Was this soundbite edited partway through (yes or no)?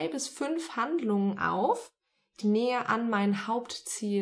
yes